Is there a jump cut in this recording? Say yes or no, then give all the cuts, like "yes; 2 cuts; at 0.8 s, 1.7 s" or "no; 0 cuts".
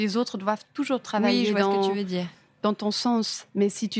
no; 0 cuts